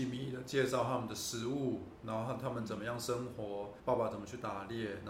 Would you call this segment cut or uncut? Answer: cut